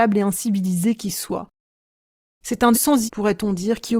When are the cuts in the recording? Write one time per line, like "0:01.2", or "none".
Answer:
0:02.7
0:03.1